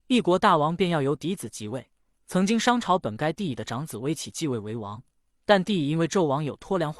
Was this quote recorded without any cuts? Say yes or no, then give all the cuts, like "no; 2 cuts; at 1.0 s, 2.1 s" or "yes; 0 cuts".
yes; 0 cuts